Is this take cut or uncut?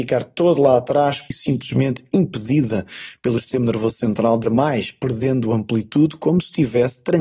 cut